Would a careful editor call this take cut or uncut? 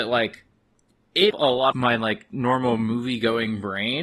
cut